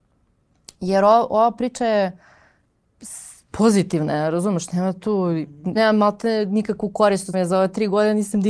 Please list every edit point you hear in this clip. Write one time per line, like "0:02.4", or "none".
0:01.8
0:05.8
0:07.3